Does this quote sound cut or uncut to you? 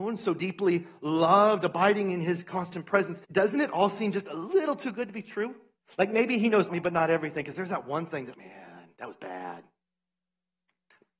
cut